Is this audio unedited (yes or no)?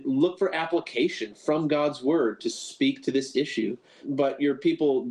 yes